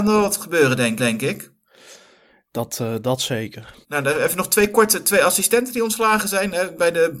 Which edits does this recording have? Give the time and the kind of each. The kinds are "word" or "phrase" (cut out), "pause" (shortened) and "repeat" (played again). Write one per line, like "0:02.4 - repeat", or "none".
0:01.0 - repeat
0:03.8 - pause